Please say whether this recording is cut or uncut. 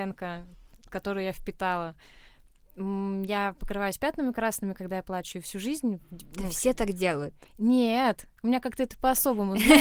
uncut